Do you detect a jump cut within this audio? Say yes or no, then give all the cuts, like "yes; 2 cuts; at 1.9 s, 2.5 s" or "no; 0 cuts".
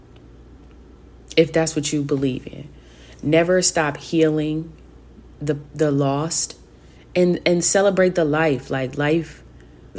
no; 0 cuts